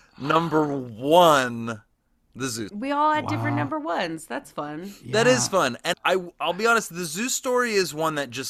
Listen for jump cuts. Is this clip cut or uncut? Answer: cut